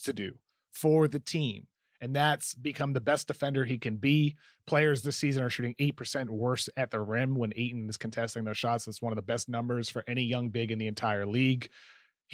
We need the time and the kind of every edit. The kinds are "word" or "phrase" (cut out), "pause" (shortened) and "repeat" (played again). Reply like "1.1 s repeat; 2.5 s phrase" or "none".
none